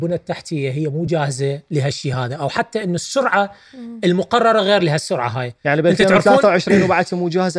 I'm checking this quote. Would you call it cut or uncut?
uncut